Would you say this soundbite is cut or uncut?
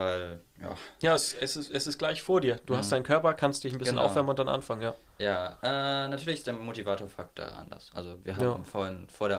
uncut